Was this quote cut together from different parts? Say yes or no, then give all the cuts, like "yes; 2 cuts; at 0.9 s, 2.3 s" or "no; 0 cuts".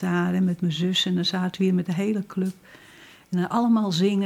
no; 0 cuts